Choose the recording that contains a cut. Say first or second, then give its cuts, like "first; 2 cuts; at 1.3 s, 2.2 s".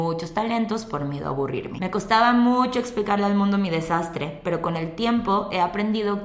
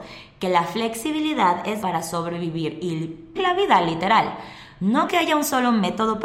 second; 3 cuts; at 1.8 s, 3.4 s, 5.1 s